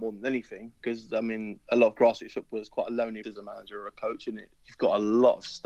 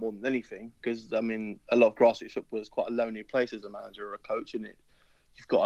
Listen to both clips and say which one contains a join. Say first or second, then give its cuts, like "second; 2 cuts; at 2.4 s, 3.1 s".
first; 2 cuts; at 3.2 s, 4.6 s